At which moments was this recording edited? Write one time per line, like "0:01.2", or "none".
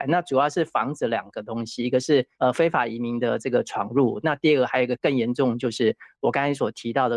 0:02.3